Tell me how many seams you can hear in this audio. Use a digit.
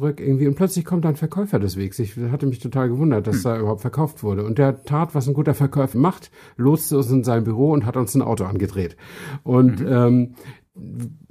1